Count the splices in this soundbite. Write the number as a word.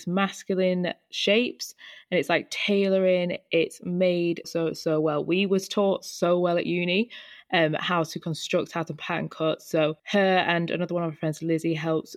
two